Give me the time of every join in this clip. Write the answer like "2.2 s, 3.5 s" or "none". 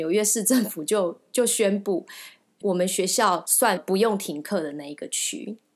2.6 s